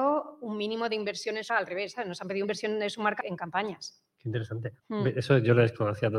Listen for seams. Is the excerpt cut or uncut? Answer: cut